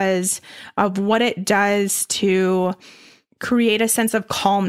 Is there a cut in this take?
no; 0 cuts

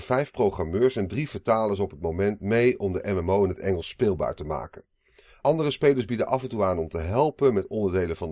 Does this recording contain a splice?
no; 0 cuts

